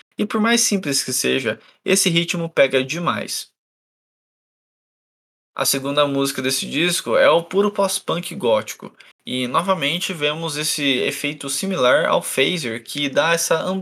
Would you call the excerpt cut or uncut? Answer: uncut